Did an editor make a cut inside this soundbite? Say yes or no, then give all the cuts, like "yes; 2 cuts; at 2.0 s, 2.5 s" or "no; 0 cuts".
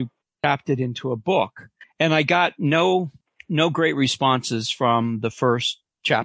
no; 0 cuts